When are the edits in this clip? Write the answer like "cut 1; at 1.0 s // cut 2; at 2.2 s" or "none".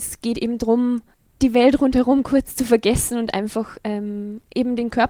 none